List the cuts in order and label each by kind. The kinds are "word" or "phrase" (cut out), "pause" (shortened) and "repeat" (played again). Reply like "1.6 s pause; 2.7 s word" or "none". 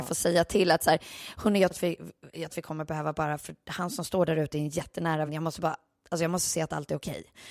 1.7 s word; 2.5 s word; 5.3 s word